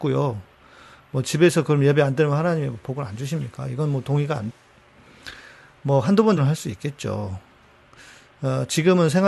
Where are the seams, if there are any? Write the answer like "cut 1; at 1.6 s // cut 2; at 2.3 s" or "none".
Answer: cut 1; at 4.5 s // cut 2; at 6.4 s

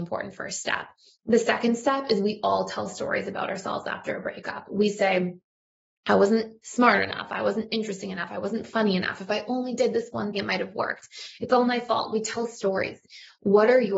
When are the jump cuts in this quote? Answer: cut 1; at 10.3 s

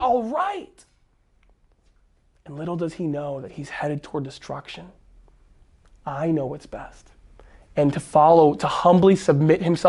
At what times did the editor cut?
none

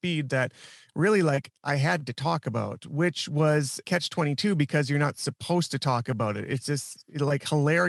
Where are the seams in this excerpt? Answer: cut 1; at 3.8 s

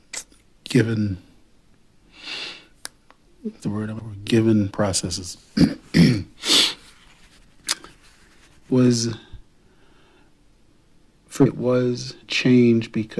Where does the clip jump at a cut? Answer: cut 1; at 3.6 s // cut 2; at 4.0 s // cut 3; at 4.7 s // cut 4; at 8.7 s // cut 5; at 11.5 s // cut 6; at 12.2 s

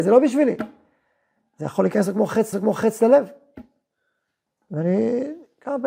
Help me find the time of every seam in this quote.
cut 1; at 2.5 s

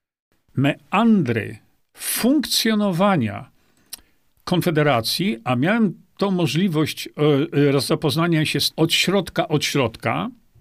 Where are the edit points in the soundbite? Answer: cut 1; at 8.7 s

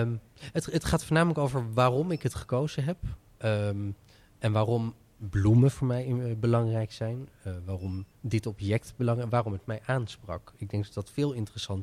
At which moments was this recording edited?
cut 1; at 8.1 s

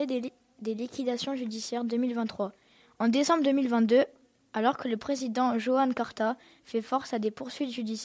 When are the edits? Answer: none

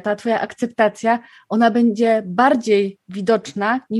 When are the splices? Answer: none

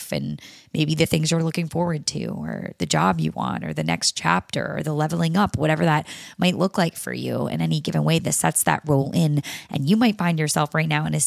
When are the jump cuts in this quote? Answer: none

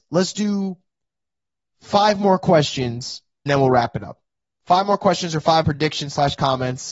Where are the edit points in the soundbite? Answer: cut 1; at 3.5 s // cut 2; at 5.6 s

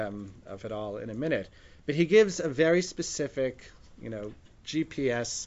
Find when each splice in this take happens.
none

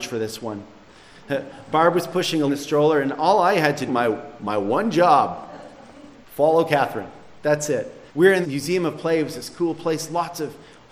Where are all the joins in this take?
cut 1; at 2.5 s // cut 2; at 3.9 s // cut 3; at 6.2 s // cut 4; at 8.1 s // cut 5; at 8.4 s

